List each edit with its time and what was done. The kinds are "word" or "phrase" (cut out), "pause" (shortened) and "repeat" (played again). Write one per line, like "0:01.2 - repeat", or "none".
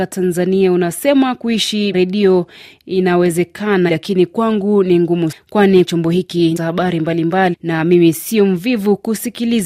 0:01.9 - word
0:03.9 - word
0:05.3 - word
0:05.9 - word
0:06.6 - word
0:07.5 - word